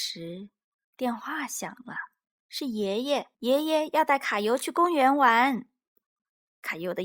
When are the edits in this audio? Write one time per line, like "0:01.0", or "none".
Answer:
0:02.2
0:03.3